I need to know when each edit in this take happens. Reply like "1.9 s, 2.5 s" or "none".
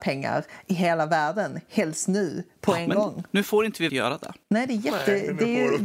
3.9 s, 4.4 s